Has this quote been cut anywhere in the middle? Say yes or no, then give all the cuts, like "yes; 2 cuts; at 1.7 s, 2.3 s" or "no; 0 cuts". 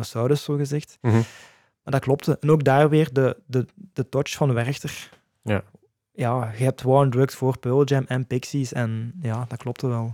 no; 0 cuts